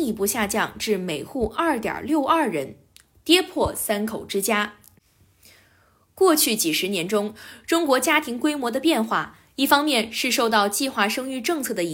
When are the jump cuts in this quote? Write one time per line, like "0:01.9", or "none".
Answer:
none